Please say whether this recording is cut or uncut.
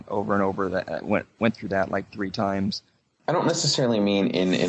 uncut